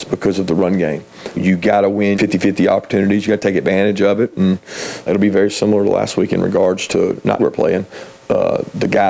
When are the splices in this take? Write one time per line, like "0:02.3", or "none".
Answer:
0:01.3
0:02.1
0:05.1
0:07.4
0:08.2